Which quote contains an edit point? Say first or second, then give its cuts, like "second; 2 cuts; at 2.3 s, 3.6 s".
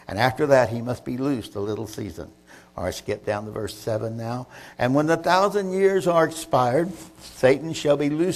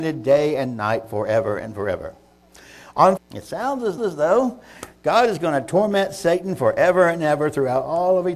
second; 2 cuts; at 3.2 s, 4.0 s